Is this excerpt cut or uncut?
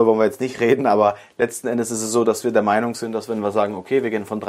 uncut